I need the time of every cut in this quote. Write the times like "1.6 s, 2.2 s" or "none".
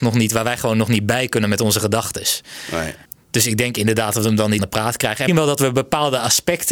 3.0 s, 4.6 s, 5.3 s